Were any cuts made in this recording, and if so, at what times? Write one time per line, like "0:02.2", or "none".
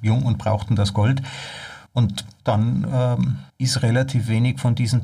0:01.9
0:03.5